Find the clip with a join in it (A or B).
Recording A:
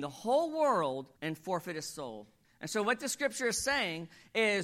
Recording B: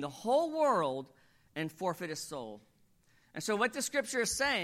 A